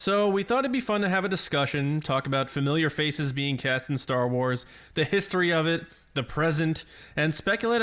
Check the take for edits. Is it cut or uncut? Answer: uncut